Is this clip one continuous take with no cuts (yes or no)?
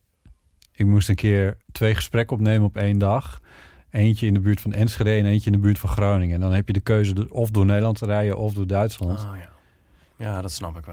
no